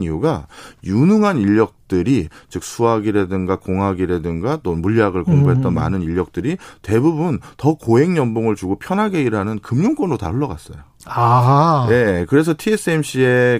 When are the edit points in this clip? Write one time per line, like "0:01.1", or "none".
none